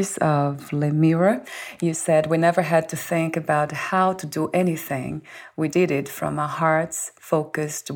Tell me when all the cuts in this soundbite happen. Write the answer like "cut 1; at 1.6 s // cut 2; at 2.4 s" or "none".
cut 1; at 5.7 s